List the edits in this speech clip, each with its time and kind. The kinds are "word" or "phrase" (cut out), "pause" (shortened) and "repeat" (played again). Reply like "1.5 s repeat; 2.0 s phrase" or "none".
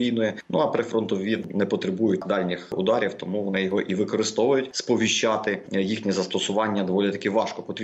1.4 s word; 5.7 s word